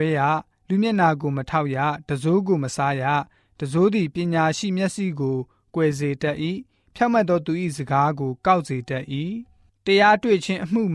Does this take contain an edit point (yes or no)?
no